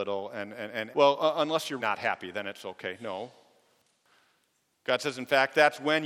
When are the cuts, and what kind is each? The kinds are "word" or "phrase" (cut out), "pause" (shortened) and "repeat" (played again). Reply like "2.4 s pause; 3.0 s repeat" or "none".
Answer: 0.9 s word; 1.8 s word